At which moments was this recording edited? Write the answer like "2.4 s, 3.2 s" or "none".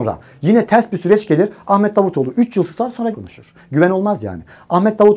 3.1 s

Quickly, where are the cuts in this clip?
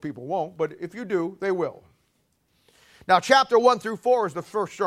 none

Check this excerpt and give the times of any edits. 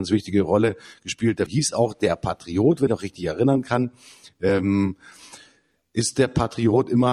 1.5 s, 2.9 s

